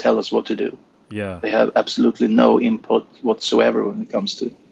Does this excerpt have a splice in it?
no; 0 cuts

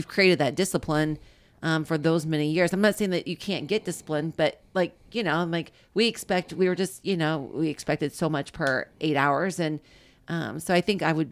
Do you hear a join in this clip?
no; 0 cuts

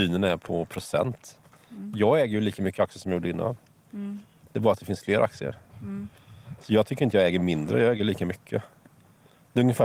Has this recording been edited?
no; 0 cuts

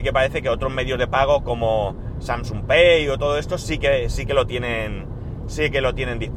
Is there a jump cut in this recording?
no; 0 cuts

